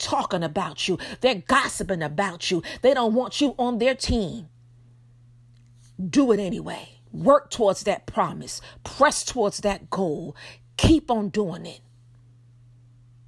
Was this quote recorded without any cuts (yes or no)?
no